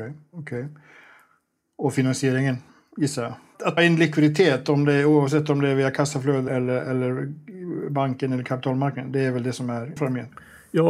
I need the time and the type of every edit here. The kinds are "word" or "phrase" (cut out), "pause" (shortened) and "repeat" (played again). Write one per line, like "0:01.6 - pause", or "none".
0:03.8 - word
0:06.5 - word
0:10.0 - word